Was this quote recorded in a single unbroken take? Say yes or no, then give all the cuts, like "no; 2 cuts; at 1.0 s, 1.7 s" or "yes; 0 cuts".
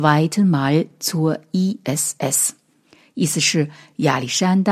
yes; 0 cuts